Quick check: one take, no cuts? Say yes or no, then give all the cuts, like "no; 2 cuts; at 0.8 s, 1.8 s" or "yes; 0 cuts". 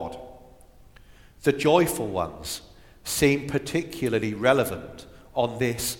yes; 0 cuts